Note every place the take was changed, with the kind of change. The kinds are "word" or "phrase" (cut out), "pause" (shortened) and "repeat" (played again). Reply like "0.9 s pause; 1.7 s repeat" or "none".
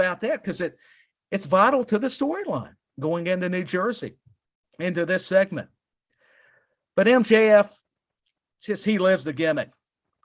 none